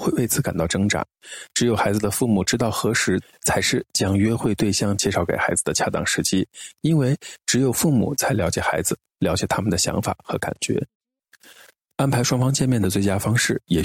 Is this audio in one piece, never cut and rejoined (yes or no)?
yes